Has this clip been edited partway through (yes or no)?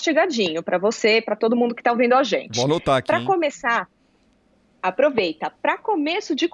no